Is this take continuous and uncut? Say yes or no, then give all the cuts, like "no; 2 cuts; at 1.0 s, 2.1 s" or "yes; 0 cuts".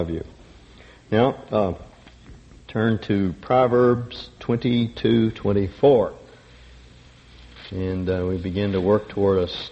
yes; 0 cuts